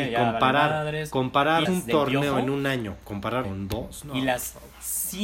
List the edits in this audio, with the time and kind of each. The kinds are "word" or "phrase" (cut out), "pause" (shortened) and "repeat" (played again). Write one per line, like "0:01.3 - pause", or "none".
0:01.7 - phrase
0:03.4 - word